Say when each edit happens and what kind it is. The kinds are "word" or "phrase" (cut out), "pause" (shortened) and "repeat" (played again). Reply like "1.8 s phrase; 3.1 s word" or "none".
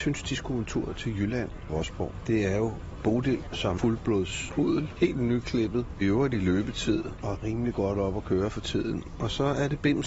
1.7 s phrase; 3.8 s word; 6.0 s word